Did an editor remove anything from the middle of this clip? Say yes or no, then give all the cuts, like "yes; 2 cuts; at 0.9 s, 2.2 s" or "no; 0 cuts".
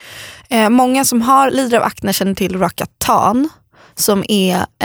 no; 0 cuts